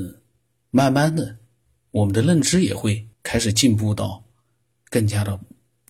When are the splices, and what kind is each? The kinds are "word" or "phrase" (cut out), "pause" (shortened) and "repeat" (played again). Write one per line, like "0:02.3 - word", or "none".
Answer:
0:03.1 - pause